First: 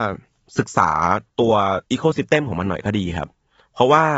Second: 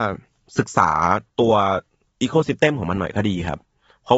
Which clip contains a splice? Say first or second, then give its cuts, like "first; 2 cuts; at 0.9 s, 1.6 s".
first; 1 cut; at 1.8 s